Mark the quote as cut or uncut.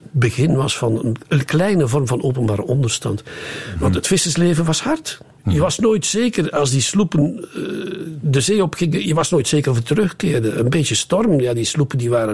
cut